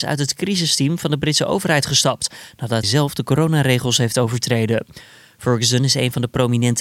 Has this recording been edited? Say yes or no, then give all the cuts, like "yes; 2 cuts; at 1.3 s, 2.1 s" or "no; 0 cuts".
yes; 1 cut; at 2.8 s